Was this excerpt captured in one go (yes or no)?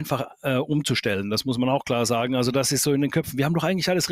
yes